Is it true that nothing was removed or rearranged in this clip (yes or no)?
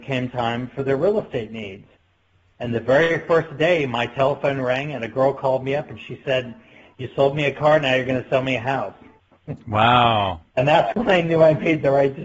yes